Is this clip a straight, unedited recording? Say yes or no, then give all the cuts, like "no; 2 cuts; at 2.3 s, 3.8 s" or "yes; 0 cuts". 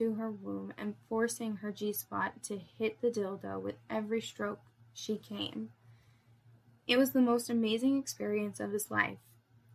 yes; 0 cuts